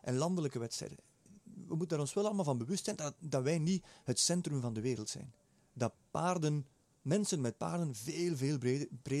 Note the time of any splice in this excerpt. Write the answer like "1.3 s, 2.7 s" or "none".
none